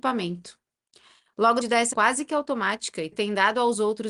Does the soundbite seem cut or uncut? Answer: cut